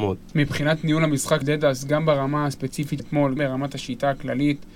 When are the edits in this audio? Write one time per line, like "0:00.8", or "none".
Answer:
0:01.4
0:03.0
0:03.4